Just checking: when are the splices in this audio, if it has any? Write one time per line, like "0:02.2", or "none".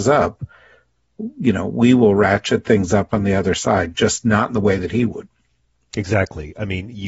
none

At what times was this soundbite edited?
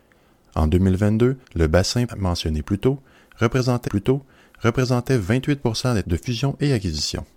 0:01.4
0:02.1
0:03.9
0:06.0

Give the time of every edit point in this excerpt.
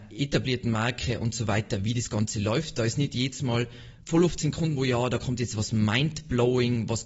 0:04.8

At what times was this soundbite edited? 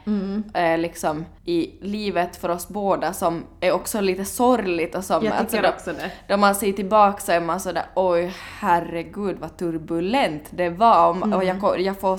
0:01.4

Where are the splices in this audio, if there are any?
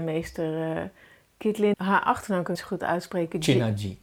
0:01.7
0:02.5

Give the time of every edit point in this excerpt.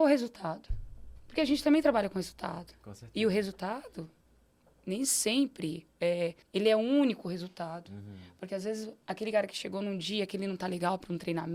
0:06.4
0:09.0

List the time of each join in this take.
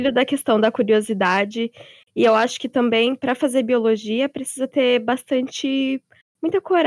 none

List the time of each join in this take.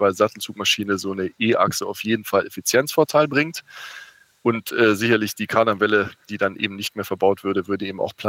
none

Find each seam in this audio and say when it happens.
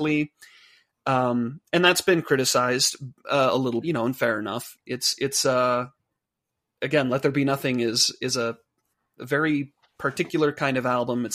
0:03.8

